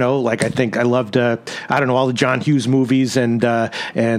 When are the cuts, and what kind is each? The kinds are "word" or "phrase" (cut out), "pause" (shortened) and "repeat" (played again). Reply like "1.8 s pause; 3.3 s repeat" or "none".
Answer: none